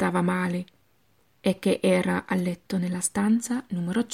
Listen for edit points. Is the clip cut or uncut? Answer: uncut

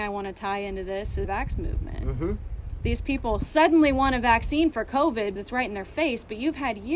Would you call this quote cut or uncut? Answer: cut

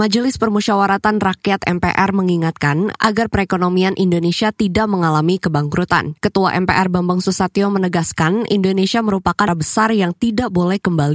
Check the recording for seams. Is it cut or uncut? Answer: cut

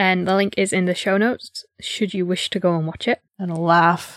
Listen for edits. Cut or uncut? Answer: cut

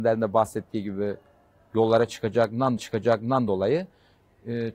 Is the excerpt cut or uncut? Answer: cut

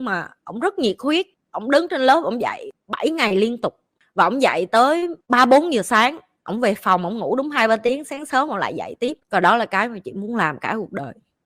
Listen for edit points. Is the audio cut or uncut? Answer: uncut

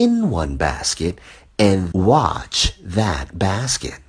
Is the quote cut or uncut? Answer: cut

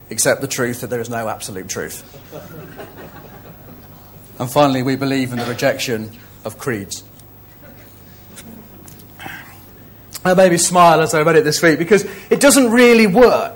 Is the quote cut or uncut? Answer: uncut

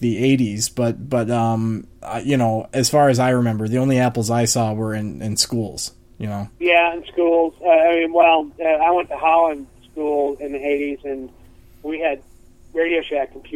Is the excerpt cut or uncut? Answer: cut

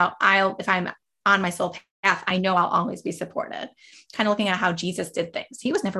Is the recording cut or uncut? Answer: uncut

